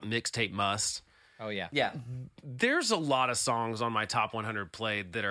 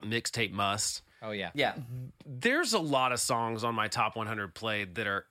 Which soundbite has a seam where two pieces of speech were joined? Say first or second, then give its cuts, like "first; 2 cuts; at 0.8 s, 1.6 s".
second; 1 cut; at 1.1 s